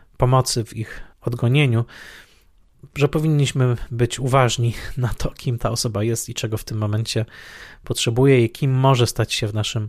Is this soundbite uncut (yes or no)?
no